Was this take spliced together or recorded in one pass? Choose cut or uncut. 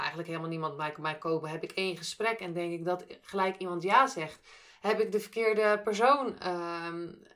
uncut